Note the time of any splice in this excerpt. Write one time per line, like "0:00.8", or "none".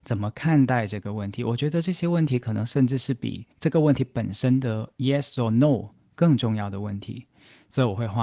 0:03.5